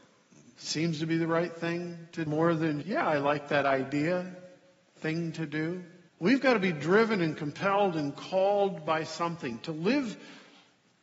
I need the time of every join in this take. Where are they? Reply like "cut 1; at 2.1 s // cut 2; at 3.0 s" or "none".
cut 1; at 2.3 s // cut 2; at 2.8 s // cut 3; at 6.1 s